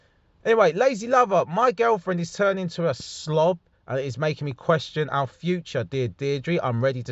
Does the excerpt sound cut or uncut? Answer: uncut